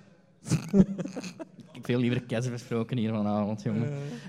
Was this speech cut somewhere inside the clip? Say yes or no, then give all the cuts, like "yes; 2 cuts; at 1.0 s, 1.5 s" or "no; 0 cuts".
yes; 1 cut; at 1.8 s